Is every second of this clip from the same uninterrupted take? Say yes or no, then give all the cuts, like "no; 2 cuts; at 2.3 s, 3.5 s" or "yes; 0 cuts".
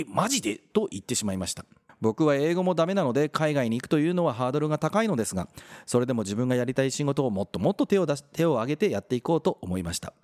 no; 1 cut; at 1.9 s